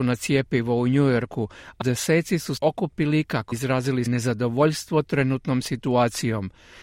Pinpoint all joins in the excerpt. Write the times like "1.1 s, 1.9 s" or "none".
1.8 s, 2.6 s, 3.5 s, 4.1 s